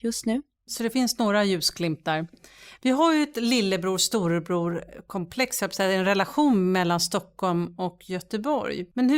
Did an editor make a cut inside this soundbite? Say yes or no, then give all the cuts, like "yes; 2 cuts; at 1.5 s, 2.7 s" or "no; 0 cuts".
no; 0 cuts